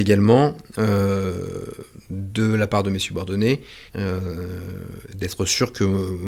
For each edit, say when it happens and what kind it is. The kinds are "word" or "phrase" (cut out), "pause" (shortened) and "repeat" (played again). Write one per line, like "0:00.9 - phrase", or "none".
0:03.9 - pause